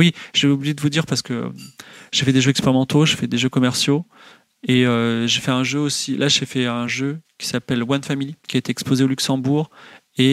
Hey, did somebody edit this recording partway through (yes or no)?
no